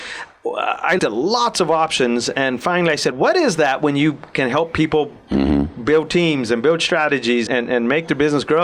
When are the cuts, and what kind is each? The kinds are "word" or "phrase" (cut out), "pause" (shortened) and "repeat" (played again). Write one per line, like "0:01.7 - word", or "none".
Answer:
0:01.0 - word
0:03.1 - word
0:07.5 - word